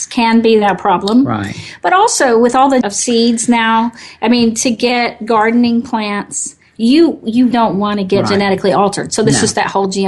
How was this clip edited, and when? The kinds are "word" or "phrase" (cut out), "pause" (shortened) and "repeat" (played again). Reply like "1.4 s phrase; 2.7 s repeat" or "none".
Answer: 2.8 s phrase; 7.5 s word